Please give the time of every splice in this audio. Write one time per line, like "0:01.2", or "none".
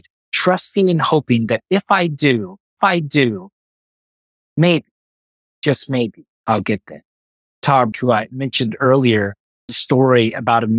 0:02.8
0:06.3
0:07.9
0:09.7